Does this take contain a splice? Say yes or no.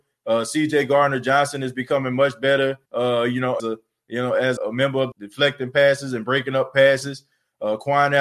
yes